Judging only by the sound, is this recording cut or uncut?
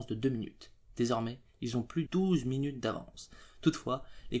cut